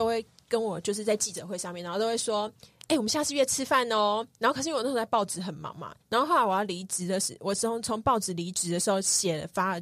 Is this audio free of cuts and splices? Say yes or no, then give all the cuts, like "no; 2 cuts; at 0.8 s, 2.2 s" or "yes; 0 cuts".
no; 1 cut; at 6.0 s